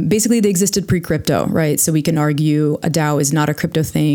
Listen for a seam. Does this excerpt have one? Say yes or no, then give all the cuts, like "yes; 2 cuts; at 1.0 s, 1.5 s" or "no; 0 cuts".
no; 0 cuts